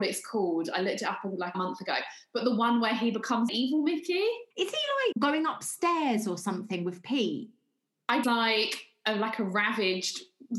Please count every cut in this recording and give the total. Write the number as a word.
five